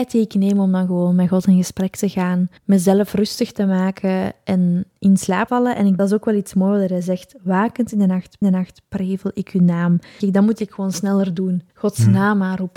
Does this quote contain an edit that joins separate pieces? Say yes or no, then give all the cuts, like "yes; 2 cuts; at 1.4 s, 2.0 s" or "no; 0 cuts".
yes; 6 cuts; at 2.6 s, 5.5 s, 6.0 s, 8.4 s, 10.2 s, 11.7 s